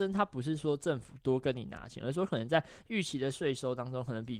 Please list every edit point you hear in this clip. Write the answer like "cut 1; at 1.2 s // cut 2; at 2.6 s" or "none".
none

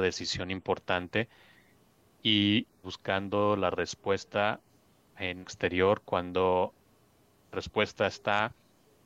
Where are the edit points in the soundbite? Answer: cut 1; at 2.8 s // cut 2; at 5.4 s // cut 3; at 7.5 s

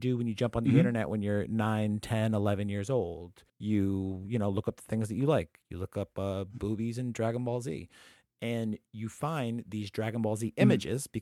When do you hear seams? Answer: cut 1; at 3.5 s

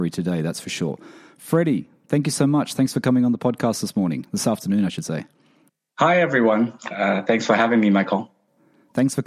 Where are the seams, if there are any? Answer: none

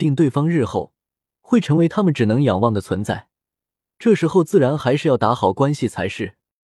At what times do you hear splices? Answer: none

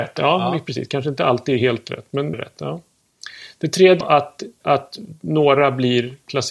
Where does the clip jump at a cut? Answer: cut 1; at 2.3 s // cut 2; at 4.0 s // cut 3; at 4.6 s

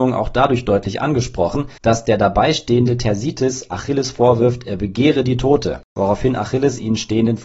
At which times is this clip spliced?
cut 1; at 1.8 s // cut 2; at 5.9 s

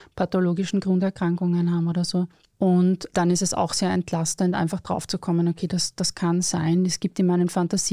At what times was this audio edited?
none

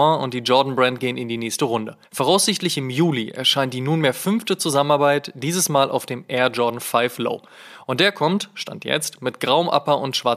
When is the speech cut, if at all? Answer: cut 1; at 2.0 s

